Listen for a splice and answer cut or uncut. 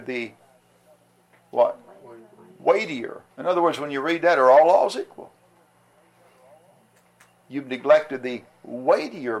cut